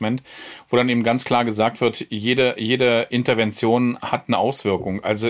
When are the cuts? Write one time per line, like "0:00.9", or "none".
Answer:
none